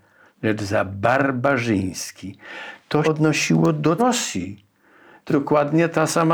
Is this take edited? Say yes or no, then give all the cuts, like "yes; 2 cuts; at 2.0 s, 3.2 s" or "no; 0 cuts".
yes; 3 cuts; at 3.0 s, 4.0 s, 5.3 s